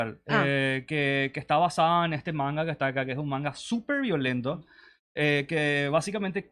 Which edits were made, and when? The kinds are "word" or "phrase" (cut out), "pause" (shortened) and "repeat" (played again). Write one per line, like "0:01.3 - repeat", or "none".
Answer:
none